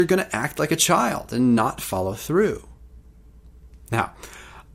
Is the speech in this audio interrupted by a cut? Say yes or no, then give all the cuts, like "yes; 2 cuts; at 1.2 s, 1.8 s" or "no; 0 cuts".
no; 0 cuts